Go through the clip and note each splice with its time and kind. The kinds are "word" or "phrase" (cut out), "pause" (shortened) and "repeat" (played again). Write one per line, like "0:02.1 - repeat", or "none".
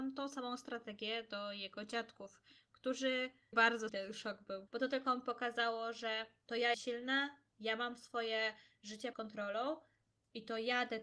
0:03.5 - word
0:03.9 - word
0:04.7 - word
0:06.7 - word
0:09.1 - word